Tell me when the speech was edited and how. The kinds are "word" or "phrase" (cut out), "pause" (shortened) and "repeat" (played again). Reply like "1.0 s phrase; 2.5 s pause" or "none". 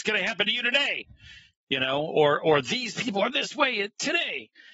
none